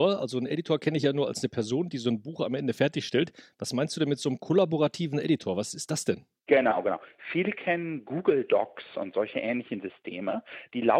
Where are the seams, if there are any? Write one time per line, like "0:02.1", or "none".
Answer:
0:06.4

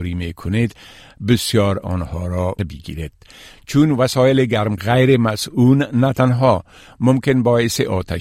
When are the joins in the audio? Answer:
0:01.8
0:02.6
0:04.8

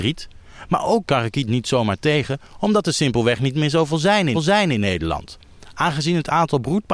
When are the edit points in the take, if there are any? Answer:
0:01.0
0:04.3

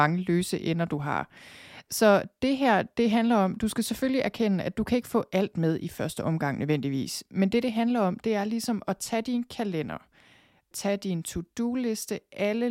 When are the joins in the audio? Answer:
none

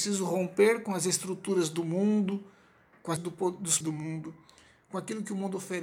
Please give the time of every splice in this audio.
0:03.2
0:03.8

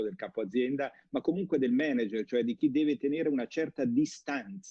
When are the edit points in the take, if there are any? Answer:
none

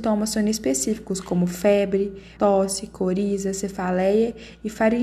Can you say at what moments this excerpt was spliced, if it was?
0:02.4

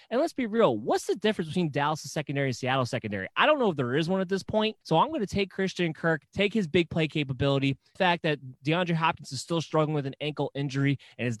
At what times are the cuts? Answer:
0:04.8
0:06.3
0:08.0

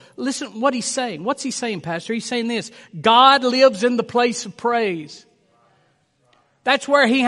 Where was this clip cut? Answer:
none

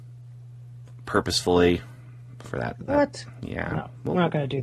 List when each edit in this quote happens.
none

